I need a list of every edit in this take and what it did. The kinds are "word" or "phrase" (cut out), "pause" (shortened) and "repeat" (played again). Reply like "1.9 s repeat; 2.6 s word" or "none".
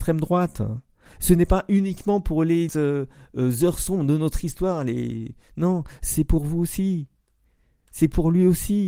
2.7 s word